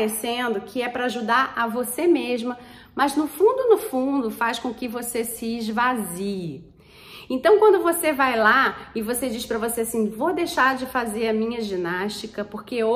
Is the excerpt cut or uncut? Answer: uncut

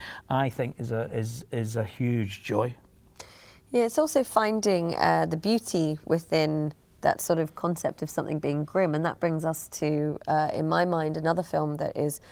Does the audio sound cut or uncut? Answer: uncut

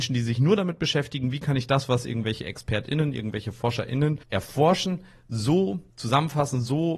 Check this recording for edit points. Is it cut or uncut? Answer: cut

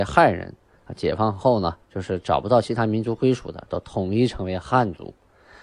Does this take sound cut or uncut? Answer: cut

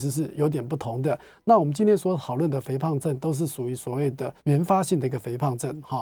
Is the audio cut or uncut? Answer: cut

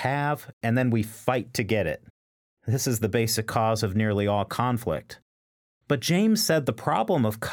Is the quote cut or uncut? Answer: uncut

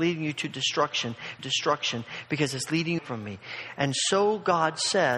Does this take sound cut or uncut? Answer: cut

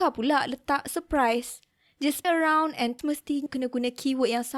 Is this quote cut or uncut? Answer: cut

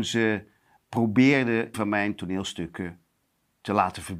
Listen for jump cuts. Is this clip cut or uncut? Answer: cut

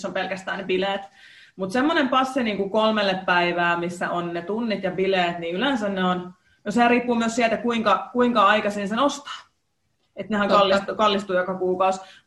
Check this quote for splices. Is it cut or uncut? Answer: uncut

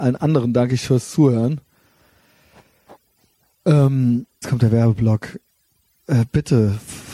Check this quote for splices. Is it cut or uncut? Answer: cut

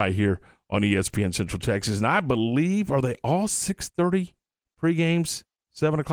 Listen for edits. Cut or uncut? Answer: uncut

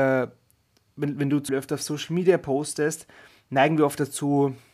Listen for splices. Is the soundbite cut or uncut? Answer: cut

